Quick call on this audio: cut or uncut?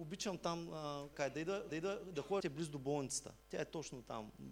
cut